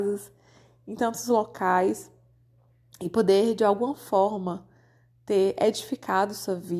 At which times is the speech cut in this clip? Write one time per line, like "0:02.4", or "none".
none